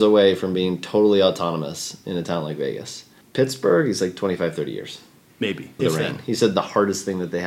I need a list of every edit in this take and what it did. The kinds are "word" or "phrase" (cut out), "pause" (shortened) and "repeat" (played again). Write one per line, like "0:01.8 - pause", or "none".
0:03.2 - pause
0:05.8 - phrase